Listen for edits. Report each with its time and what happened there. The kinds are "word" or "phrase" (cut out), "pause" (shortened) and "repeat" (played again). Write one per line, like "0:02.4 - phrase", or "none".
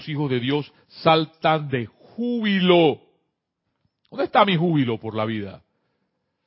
none